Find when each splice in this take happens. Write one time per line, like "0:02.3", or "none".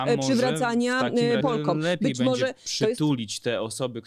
0:01.4

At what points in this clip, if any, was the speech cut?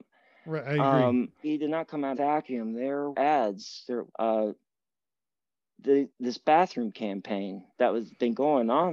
0:01.4
0:02.1
0:03.1
0:04.1
0:06.1
0:07.7

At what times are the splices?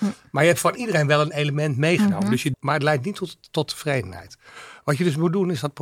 0:02.5

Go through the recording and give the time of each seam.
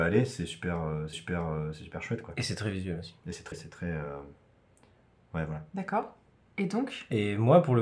0:01.1
0:03.5
0:05.7

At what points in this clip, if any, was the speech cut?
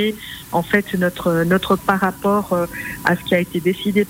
0:01.8

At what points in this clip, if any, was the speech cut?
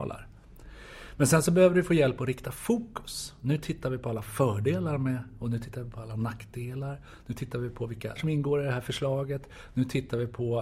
0:08.2

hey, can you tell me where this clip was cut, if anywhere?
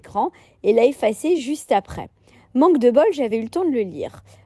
none

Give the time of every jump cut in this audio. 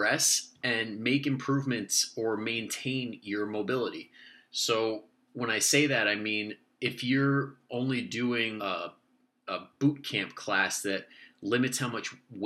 0:08.6

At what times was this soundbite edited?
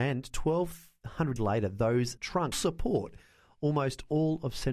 0:01.4
0:02.2
0:02.5

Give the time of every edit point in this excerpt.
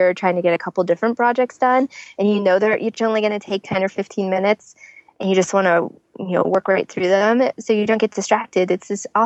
none

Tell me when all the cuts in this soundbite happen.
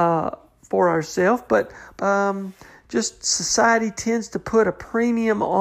0:02.0

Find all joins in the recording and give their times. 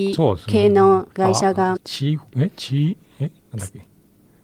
0:01.1
0:01.8
0:03.4

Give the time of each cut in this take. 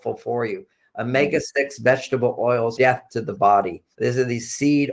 0:02.8
0:03.9

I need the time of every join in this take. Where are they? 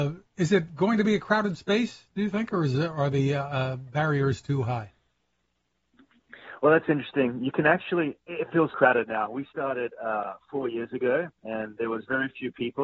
0:08.7

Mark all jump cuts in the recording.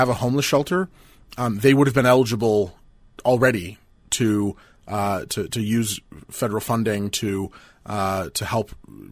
none

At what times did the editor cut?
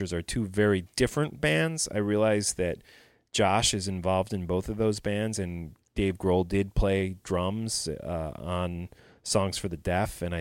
none

